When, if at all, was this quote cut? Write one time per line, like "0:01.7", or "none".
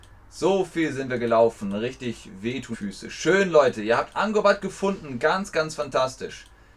0:02.7